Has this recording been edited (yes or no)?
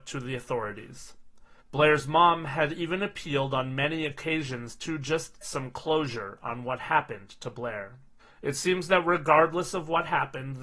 yes